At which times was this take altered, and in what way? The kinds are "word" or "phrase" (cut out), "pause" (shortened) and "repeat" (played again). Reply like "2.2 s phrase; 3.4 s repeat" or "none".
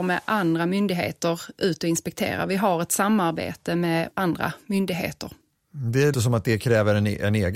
6.1 s word